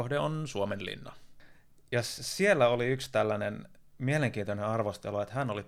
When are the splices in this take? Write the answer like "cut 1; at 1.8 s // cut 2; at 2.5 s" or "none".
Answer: none